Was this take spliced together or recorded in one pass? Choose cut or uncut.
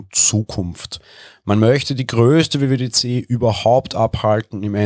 uncut